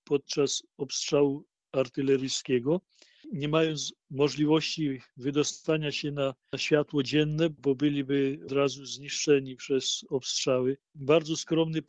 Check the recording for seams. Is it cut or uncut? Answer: cut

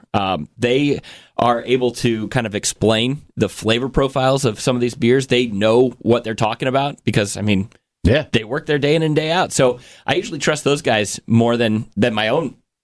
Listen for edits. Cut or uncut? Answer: uncut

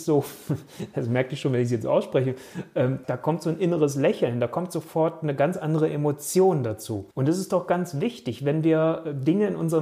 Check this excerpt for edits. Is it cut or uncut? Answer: cut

